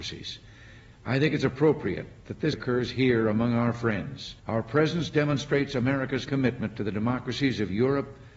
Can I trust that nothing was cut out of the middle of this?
no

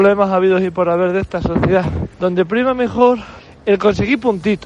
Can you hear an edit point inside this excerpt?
yes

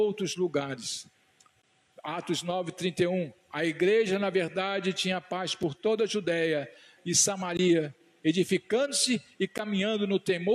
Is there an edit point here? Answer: yes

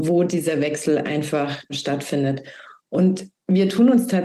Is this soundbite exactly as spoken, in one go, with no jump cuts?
yes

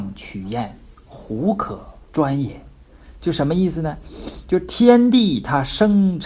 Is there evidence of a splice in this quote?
yes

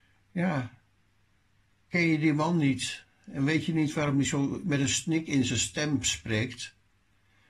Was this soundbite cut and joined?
no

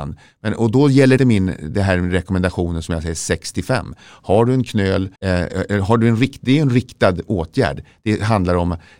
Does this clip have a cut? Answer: yes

